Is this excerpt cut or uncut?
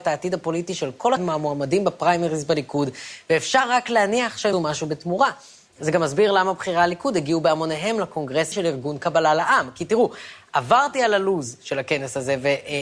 cut